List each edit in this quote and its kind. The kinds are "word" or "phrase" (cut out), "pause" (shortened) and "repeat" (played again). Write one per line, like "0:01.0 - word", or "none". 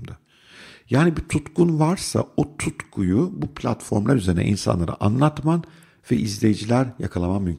none